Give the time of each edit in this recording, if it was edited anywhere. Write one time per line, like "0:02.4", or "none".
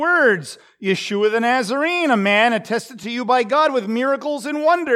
none